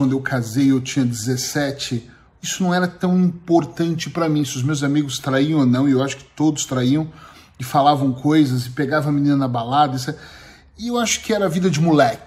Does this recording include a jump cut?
no; 0 cuts

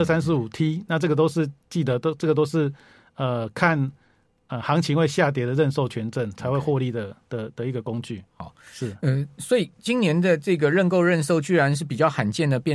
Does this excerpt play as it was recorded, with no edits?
yes; 0 cuts

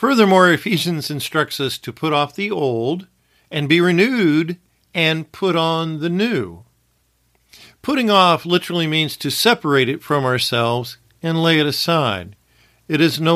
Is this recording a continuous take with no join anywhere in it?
yes; 0 cuts

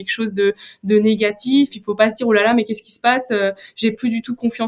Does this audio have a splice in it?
no; 0 cuts

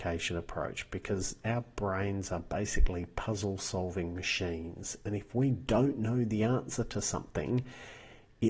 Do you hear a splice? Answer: no; 0 cuts

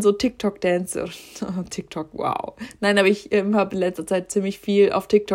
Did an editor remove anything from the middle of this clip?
no; 0 cuts

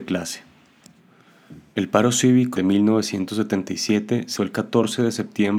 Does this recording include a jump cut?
yes; 2 cuts; at 2.6 s, 4.4 s

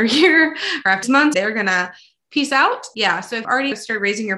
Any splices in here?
yes; 3 cuts; at 1.0 s, 1.3 s, 3.4 s

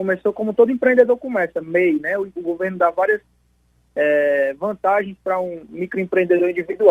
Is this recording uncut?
yes; 0 cuts

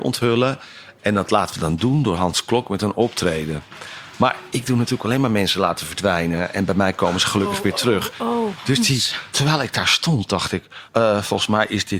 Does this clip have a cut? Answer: yes; 1 cut; at 10.9 s

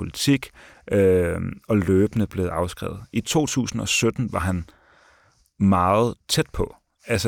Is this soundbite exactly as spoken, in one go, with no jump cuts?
no; 1 cut; at 6.2 s

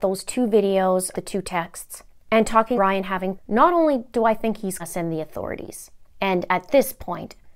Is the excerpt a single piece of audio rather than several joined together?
no; 4 cuts; at 1.1 s, 2.7 s, 3.3 s, 4.8 s

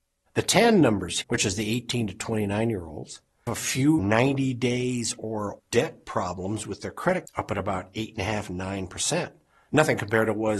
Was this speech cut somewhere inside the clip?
yes; 5 cuts; at 1.2 s, 3.5 s, 4.0 s, 5.6 s, 7.3 s

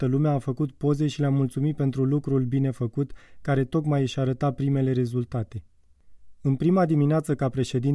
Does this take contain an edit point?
no; 0 cuts

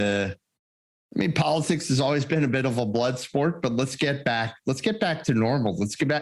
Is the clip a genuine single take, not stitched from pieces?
yes; 0 cuts

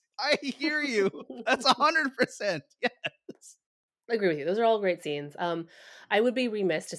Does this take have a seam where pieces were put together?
no; 0 cuts

